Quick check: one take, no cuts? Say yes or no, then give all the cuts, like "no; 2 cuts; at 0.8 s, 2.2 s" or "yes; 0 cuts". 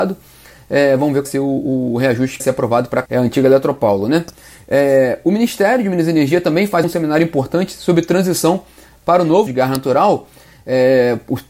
no; 5 cuts; at 1.2 s, 2.4 s, 3.0 s, 6.8 s, 9.5 s